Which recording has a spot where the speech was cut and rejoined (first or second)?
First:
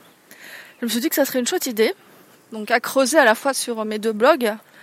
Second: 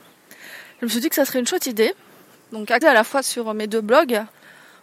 second